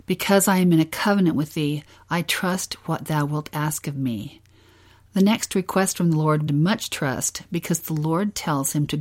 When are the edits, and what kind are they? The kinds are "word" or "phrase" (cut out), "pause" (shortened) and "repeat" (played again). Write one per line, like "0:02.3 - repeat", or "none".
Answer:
0:06.5 - phrase